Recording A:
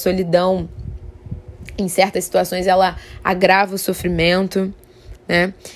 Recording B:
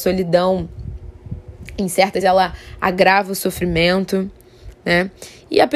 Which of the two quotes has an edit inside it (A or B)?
B